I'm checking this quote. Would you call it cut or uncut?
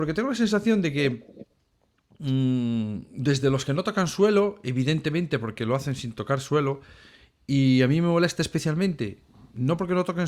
uncut